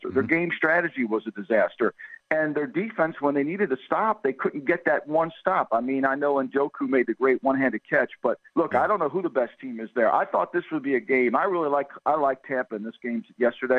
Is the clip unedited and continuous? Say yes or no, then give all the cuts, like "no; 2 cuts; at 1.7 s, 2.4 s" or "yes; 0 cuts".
no; 1 cut; at 8.5 s